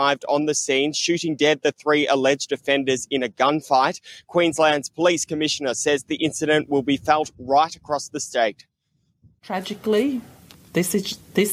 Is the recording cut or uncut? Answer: uncut